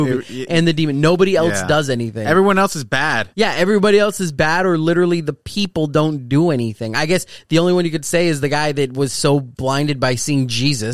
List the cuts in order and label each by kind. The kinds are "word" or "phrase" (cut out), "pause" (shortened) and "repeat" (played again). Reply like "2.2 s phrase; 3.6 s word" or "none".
3.3 s pause